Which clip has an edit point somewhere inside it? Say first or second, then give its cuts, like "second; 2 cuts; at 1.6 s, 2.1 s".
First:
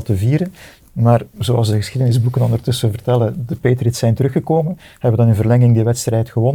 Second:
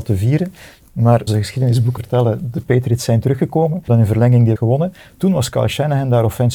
second; 4 cuts; at 1.3 s, 2.0 s, 3.9 s, 4.6 s